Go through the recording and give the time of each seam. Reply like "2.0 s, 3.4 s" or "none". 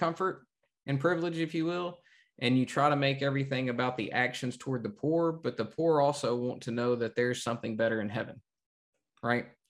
none